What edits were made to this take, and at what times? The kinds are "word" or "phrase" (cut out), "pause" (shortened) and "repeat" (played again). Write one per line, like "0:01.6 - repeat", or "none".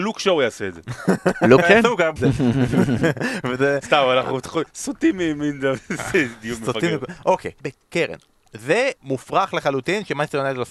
0:01.6 - word
0:02.2 - phrase
0:04.7 - pause
0:07.6 - phrase
0:09.0 - pause